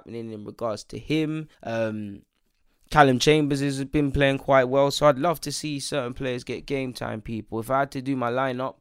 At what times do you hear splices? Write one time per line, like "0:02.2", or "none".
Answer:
0:01.5